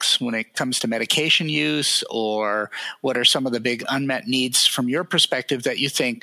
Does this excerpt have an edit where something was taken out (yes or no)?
no